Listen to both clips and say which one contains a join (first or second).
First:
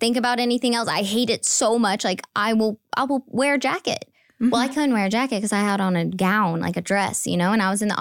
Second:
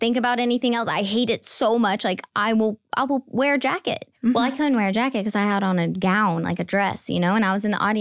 second